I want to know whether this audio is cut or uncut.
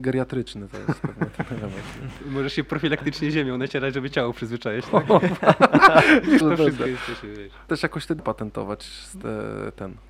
cut